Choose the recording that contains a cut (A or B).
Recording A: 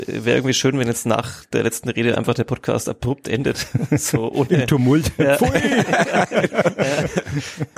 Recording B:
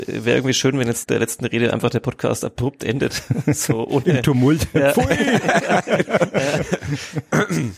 B